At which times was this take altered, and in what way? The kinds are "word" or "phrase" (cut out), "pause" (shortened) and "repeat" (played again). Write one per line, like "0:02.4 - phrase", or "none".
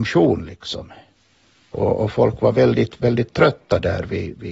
none